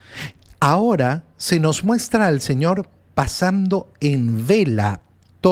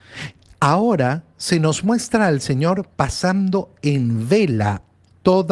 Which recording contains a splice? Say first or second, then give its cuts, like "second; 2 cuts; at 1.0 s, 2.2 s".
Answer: second; 1 cut; at 2.9 s